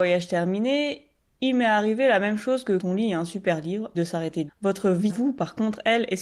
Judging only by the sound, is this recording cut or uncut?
cut